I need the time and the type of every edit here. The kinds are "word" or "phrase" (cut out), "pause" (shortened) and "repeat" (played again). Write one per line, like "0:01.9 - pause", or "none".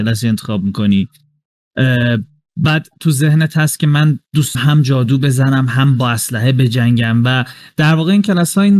0:04.5 - word